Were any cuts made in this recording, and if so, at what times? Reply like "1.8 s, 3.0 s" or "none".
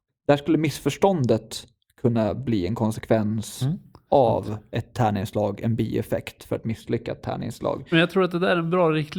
none

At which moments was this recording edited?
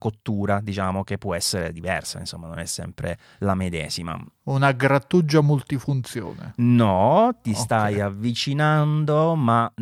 none

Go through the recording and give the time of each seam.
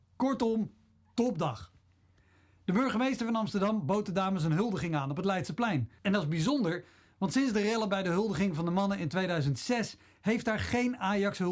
6.0 s

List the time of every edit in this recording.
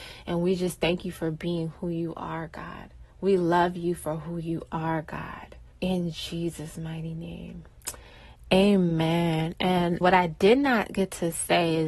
3.1 s, 5.7 s, 10.0 s

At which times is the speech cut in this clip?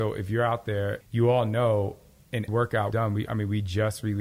1.0 s, 2.5 s, 2.9 s

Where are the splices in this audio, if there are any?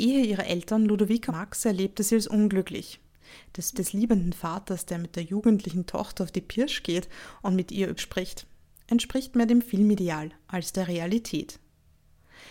1.3 s, 3.7 s, 8.0 s

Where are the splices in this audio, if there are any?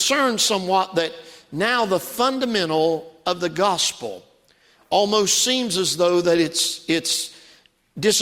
none

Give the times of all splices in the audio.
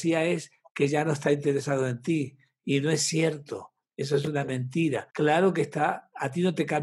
5.1 s

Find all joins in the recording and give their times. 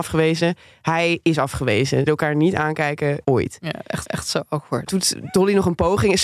2.1 s, 3.2 s, 4.0 s, 4.9 s

